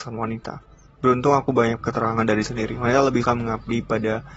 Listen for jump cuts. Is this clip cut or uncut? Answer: cut